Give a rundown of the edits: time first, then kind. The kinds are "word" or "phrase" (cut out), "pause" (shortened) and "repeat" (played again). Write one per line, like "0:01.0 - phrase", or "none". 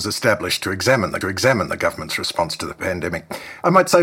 0:01.2 - repeat